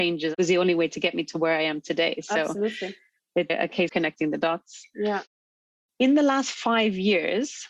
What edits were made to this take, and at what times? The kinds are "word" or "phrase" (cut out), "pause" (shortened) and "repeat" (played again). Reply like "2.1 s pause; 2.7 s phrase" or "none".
3.5 s word; 3.9 s word